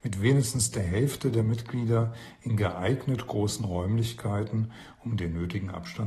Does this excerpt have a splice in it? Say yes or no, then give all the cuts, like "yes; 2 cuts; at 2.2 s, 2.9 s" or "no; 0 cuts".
no; 0 cuts